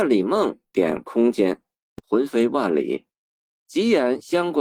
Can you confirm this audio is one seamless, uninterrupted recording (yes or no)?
yes